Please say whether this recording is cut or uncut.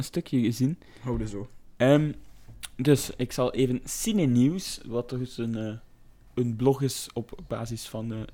uncut